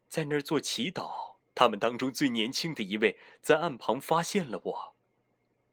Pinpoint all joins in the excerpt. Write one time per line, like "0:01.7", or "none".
0:01.4